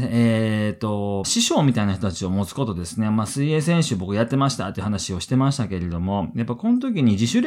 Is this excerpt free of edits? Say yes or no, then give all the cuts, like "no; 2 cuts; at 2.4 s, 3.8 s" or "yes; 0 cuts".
no; 1 cut; at 1.2 s